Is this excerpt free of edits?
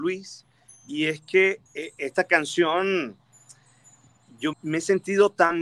no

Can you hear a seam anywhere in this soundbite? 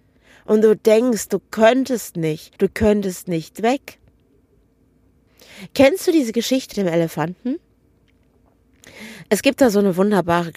yes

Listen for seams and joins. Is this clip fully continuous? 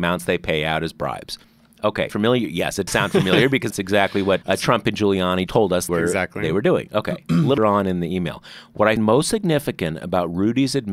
no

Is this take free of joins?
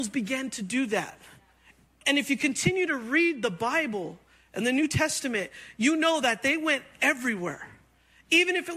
yes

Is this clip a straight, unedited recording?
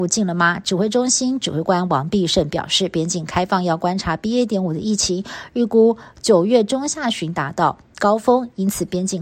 yes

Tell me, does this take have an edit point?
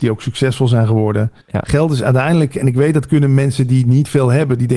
yes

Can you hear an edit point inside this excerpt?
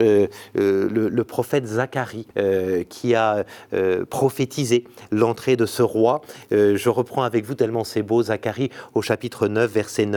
yes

